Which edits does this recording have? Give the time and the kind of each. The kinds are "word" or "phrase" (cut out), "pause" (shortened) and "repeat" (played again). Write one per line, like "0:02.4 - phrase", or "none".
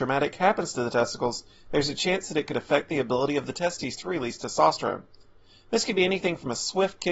none

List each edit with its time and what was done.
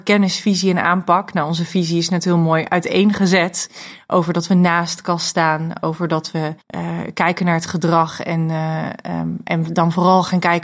0:06.6 - pause

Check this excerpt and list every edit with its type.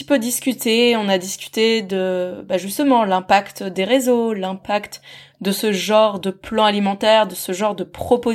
none

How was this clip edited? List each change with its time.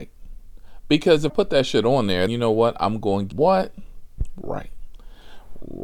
0:01.3 - word
0:02.3 - word
0:03.3 - word

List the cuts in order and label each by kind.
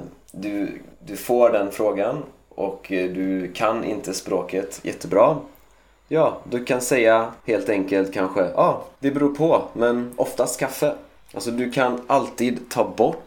0:00.9 - pause
0:07.4 - pause
0:09.0 - pause
0:11.2 - pause

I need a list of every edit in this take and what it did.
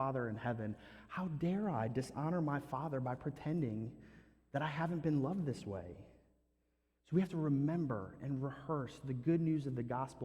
none

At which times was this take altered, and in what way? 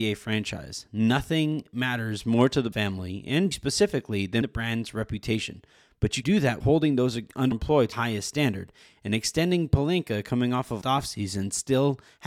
0:02.7 - word
0:03.5 - word
0:04.4 - word
0:06.2 - word
0:06.6 - word
0:07.5 - word
0:07.9 - word
0:10.8 - word

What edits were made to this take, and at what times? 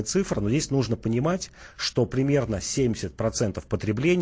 none

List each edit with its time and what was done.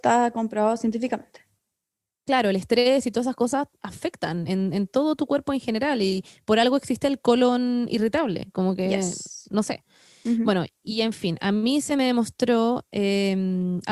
none

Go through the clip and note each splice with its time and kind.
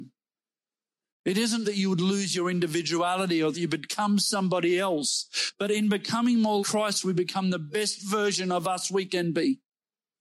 0:01.6 - word
0:03.5 - word
0:06.6 - word

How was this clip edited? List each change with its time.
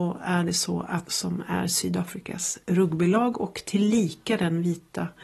0:01.0 - word

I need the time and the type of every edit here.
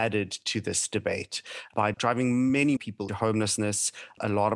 0:01.9 - word
0:02.8 - word
0:03.1 - word

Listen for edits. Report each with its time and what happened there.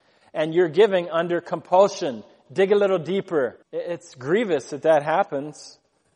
0:03.6 - pause

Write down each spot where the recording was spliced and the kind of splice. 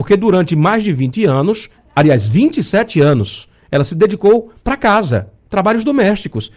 0:01.7 - pause
0:04.6 - pause

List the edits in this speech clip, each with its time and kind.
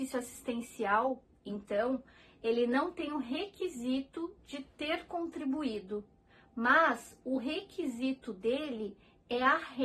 none

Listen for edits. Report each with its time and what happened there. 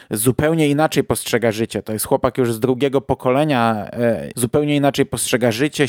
0:04.3 - word

